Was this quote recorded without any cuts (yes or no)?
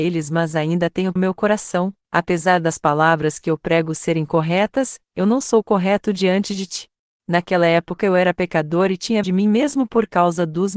no